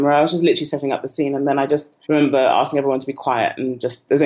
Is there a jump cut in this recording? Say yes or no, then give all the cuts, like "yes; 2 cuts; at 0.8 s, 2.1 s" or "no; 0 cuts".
yes; 1 cut; at 2.0 s